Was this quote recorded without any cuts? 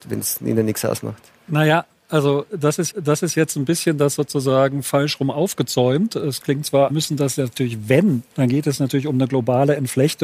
no; 3 cuts; at 2.9 s, 6.9 s, 8.3 s

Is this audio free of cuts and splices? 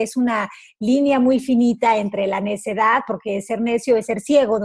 yes; 0 cuts

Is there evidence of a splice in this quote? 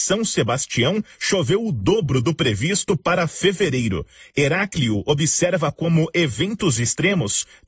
no; 0 cuts

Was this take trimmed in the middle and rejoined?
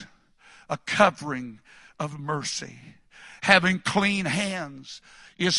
no; 0 cuts

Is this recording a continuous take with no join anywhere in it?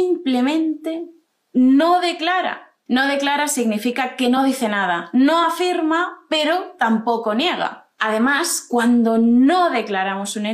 yes; 0 cuts

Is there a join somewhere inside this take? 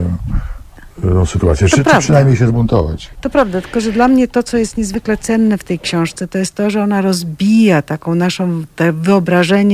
no; 0 cuts

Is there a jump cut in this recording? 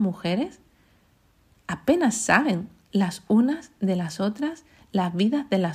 no; 0 cuts

